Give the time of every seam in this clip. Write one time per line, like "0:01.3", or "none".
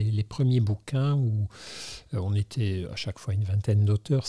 none

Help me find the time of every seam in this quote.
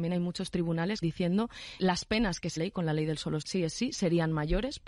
0:01.0
0:01.8
0:02.6
0:03.4

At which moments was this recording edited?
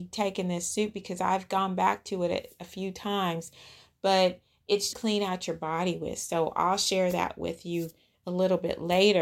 0:04.9

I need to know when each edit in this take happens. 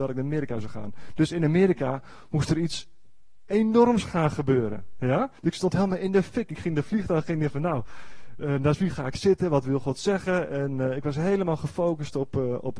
0:05.4

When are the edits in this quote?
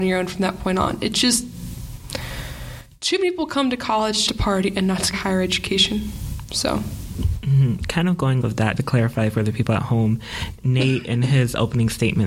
0:04.3
0:05.1
0:08.4
0:08.8

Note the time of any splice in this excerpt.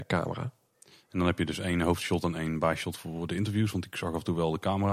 none

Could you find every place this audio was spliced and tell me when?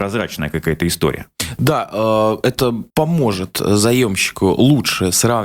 0:02.9

